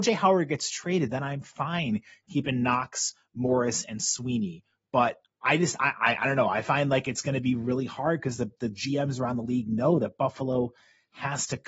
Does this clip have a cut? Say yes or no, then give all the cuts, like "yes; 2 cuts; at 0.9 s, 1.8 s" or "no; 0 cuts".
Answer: no; 0 cuts